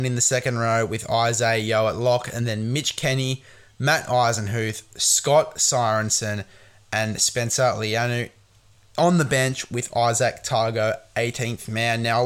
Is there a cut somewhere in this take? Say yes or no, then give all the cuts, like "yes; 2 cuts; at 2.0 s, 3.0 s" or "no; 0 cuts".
no; 0 cuts